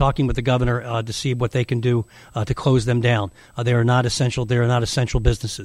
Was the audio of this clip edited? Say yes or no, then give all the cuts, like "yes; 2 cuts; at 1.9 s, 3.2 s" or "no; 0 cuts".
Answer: no; 0 cuts